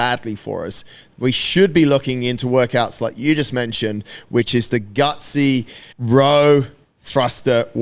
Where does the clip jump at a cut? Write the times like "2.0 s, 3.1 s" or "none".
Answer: 4.7 s, 5.9 s